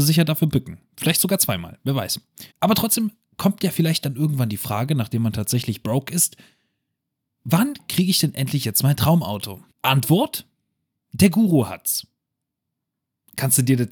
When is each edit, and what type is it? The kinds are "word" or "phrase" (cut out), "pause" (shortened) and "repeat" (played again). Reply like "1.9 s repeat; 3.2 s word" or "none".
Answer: 2.5 s pause; 9.7 s pause